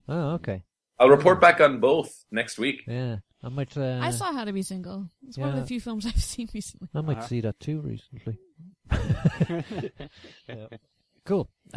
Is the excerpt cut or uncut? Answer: uncut